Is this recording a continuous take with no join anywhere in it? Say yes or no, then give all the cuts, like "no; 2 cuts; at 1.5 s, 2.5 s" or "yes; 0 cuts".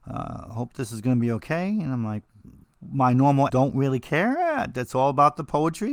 no; 2 cuts; at 2.6 s, 3.5 s